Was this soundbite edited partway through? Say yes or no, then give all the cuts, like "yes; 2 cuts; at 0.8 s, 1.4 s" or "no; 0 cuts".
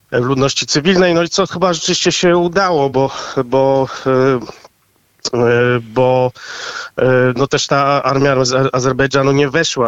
no; 0 cuts